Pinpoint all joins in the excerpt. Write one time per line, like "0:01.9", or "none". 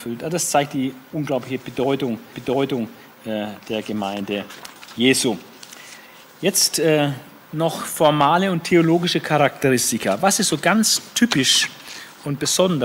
0:02.3
0:07.4